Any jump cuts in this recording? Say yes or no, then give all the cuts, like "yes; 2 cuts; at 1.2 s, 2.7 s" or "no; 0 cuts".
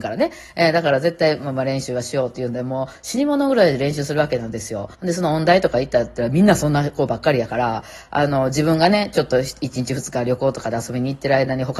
yes; 1 cut; at 4.9 s